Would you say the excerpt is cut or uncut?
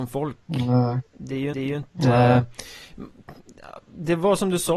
cut